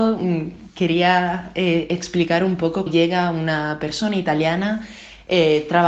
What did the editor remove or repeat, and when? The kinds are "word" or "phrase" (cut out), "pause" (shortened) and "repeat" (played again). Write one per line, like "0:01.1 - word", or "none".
0:02.9 - word